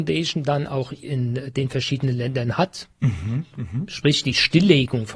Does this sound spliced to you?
yes; 1 cut; at 1.0 s

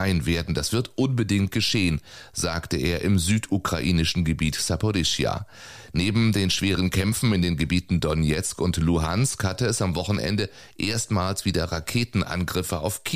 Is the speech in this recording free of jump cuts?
yes; 0 cuts

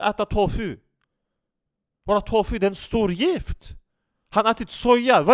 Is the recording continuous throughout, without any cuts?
yes; 0 cuts

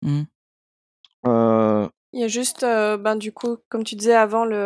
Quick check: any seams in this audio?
no; 0 cuts

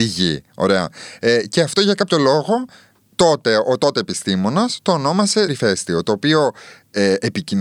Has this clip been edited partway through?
yes; 1 cut; at 5.5 s

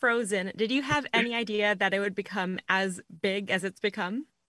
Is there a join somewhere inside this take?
no; 0 cuts

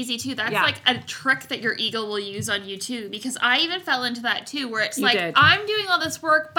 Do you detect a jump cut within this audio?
no; 0 cuts

